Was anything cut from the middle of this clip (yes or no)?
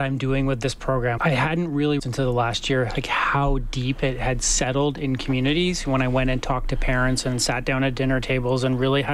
yes